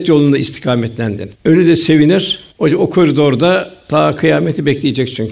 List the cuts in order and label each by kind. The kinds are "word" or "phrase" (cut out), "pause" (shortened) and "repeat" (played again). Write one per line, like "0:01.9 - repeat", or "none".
0:01.4 - pause
0:02.5 - pause